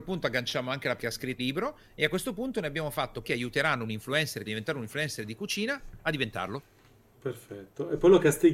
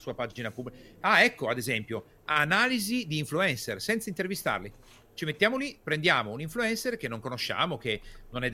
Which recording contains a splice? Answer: first; 4 cuts; at 1.0 s, 1.4 s, 3.2 s, 4.5 s

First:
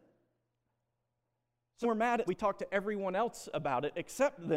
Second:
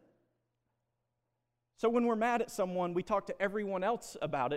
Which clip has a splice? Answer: first; 2 cuts; at 1.8 s, 2.3 s

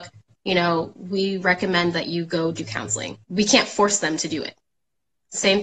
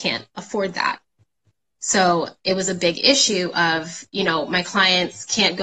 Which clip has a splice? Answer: first; 1 cut; at 3.2 s

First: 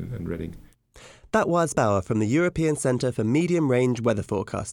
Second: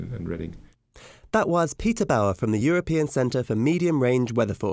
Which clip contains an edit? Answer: first; 1 cut; at 1.7 s

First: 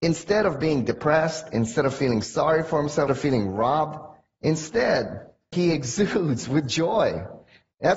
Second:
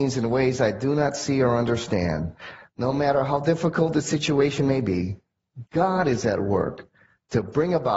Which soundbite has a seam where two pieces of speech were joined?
first; 1 cut; at 3.1 s

